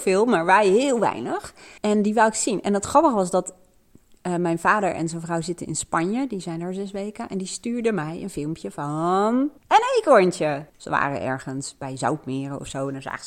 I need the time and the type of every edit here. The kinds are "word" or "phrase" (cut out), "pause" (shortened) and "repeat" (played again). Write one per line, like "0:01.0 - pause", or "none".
0:01.8 - pause
0:09.6 - pause
0:10.7 - pause